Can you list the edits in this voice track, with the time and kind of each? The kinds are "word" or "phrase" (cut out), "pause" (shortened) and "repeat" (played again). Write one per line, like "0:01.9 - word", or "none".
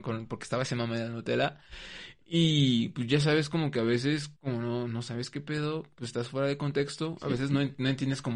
0:04.4 - pause